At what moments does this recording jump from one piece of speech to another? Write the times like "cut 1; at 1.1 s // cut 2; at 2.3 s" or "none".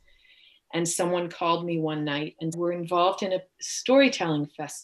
cut 1; at 2.5 s